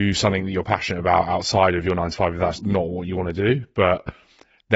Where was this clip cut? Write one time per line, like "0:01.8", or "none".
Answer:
0:02.6